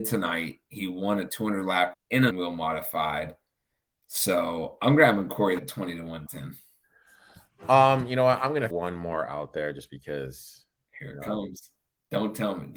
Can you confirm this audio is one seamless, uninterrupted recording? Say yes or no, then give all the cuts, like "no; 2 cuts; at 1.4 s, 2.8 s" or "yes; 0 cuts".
no; 5 cuts; at 1.9 s, 2.3 s, 5.6 s, 6.3 s, 8.7 s